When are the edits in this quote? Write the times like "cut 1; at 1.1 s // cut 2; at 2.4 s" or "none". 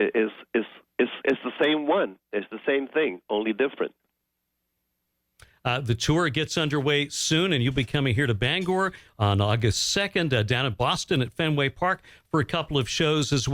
none

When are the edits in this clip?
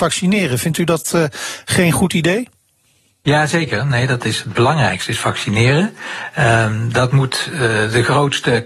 none

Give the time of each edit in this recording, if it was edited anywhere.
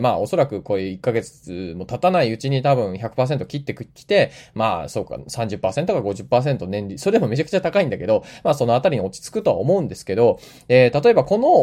none

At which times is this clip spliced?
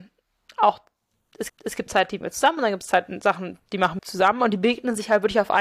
cut 1; at 1.5 s // cut 2; at 2.2 s // cut 3; at 4.0 s

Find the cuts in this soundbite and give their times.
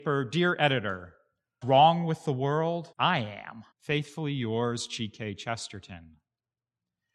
cut 1; at 1.6 s // cut 2; at 2.9 s // cut 3; at 3.7 s

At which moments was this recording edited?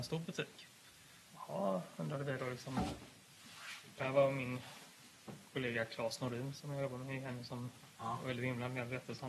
cut 1; at 1.2 s

